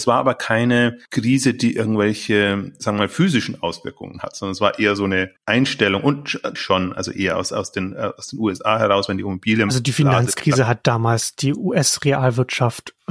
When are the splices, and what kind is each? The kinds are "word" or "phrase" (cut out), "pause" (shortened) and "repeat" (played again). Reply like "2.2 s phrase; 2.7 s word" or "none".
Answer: 5.4 s pause; 6.6 s phrase

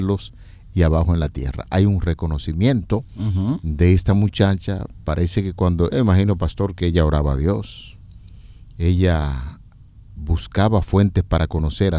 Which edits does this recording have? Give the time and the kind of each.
3.1 s pause; 5.9 s phrase; 10.2 s word

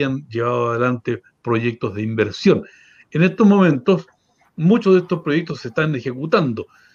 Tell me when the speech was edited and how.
none

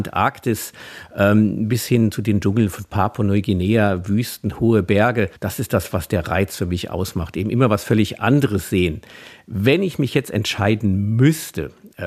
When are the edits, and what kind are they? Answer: 5.4 s pause

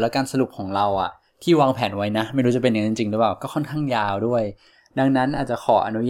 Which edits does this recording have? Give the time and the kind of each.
none

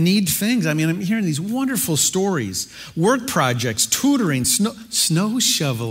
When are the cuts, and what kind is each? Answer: none

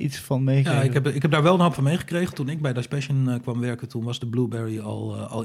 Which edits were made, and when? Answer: none

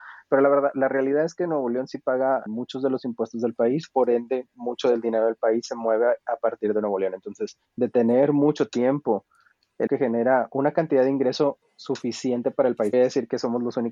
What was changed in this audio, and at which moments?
2.5 s word; 7.7 s pause; 9.9 s word; 11.6 s pause; 12.9 s phrase

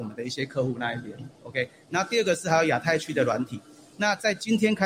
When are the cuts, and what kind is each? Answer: 1.3 s pause

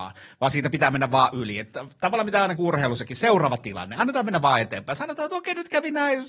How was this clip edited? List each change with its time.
2.6 s word

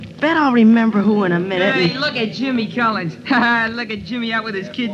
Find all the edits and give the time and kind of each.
none

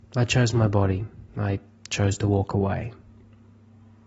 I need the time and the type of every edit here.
1.3 s pause

